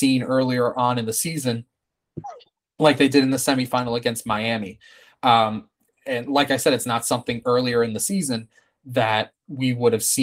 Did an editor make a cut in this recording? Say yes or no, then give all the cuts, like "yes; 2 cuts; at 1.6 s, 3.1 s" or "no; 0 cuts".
no; 0 cuts